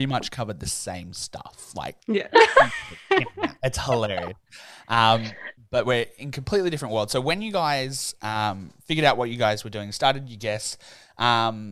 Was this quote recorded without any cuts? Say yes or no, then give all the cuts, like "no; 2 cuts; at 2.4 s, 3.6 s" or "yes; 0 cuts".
no; 2 cuts; at 2.0 s, 5.6 s